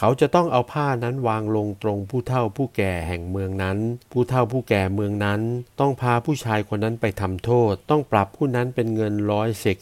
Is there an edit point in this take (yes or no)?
yes